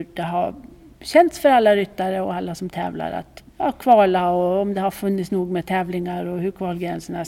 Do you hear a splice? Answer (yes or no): yes